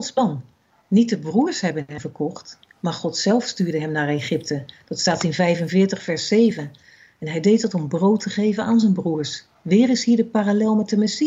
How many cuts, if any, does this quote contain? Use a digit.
0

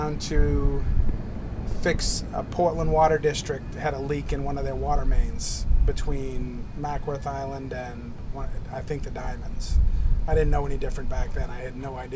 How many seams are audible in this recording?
0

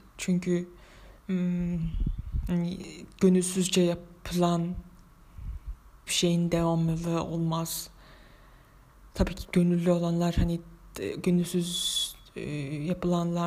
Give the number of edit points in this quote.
3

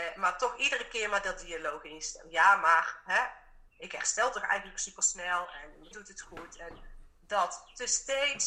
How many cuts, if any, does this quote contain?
3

